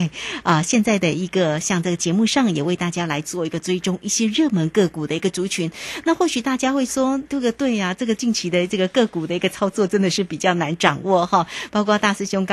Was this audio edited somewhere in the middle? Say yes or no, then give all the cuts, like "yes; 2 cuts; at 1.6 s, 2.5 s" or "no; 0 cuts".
yes; 1 cut; at 7.3 s